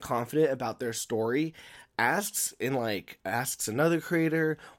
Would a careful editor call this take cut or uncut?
uncut